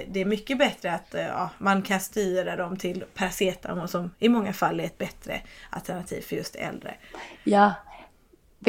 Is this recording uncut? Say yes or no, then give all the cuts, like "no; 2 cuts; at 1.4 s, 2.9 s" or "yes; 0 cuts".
yes; 0 cuts